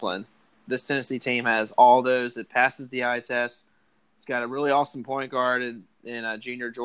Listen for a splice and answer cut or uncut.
uncut